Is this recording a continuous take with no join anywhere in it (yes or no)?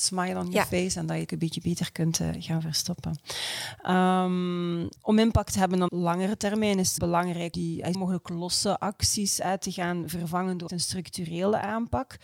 no